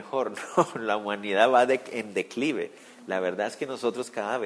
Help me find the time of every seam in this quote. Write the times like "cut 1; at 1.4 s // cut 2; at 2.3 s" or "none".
none